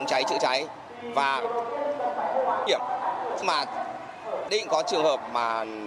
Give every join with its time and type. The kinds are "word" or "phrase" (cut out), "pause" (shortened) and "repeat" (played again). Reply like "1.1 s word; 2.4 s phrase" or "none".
2.7 s word; 3.4 s word; 4.5 s word